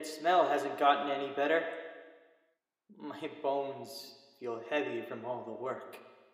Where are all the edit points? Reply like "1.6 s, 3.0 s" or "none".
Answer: none